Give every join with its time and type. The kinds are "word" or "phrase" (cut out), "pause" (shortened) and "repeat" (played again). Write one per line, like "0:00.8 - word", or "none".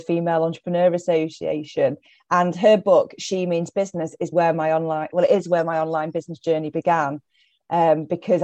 0:04.3 - word

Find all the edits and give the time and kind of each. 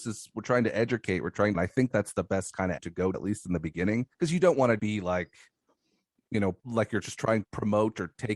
0:01.5 - phrase
0:01.9 - word
0:02.8 - word
0:03.1 - word
0:04.1 - pause
0:04.8 - word
0:06.6 - pause
0:07.4 - word

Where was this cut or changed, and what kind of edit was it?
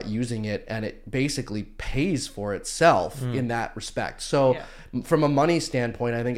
none

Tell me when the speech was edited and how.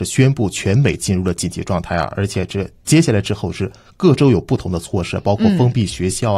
none

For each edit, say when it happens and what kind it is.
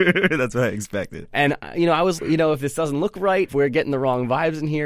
0:02.2 - word
0:03.5 - word

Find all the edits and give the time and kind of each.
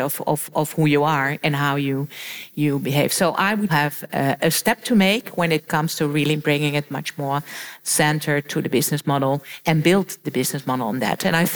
0:03.7 - phrase

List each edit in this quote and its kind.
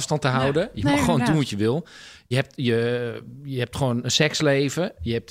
0:02.3 - word

